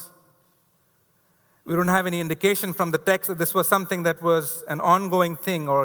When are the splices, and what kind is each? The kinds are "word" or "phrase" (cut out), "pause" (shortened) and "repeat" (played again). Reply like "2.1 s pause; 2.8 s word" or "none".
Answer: none